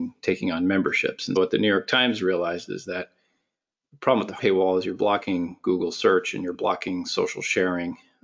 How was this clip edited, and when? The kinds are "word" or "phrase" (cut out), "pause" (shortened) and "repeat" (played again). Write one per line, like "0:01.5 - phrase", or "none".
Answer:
0:01.4 - word
0:04.4 - word